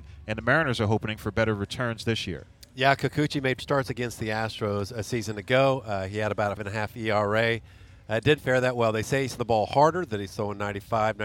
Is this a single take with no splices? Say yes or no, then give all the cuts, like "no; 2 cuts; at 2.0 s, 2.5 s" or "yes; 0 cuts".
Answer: no; 4 cuts; at 3.6 s, 6.6 s, 8.4 s, 9.4 s